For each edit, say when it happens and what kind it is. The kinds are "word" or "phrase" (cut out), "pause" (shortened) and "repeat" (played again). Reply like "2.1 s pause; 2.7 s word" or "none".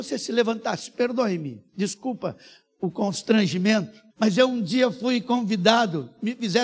1.7 s pause; 4.1 s pause